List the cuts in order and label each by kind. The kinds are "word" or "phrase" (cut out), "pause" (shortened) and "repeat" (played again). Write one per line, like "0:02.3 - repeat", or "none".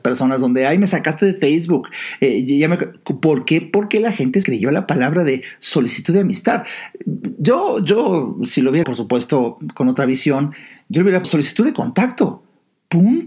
0:04.4 - word
0:08.8 - word
0:11.2 - word